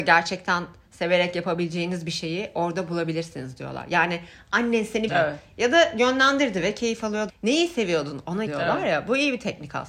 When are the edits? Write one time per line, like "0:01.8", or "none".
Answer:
0:05.1
0:07.3
0:08.5